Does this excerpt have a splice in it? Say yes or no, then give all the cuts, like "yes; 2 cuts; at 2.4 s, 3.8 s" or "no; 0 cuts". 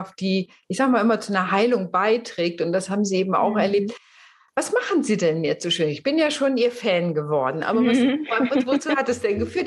no; 0 cuts